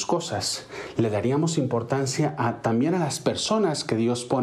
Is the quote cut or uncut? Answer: uncut